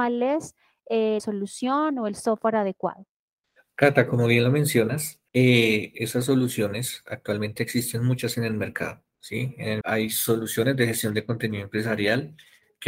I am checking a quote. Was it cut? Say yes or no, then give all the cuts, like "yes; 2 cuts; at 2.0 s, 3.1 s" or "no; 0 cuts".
yes; 3 cuts; at 1.2 s, 5.3 s, 9.8 s